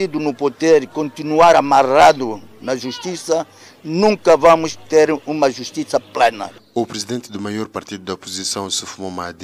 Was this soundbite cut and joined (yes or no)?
no